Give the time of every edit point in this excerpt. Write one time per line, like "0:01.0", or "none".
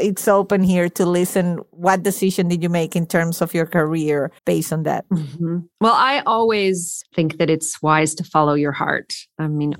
0:04.4